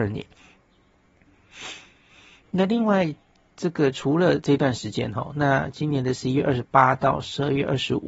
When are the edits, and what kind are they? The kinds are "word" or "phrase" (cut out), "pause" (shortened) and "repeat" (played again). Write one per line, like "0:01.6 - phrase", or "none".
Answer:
none